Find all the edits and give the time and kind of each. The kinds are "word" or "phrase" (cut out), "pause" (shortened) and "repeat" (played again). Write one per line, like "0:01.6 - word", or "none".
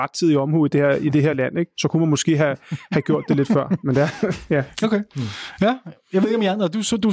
0:04.7 - pause